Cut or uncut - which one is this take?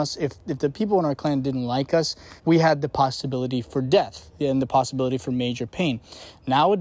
cut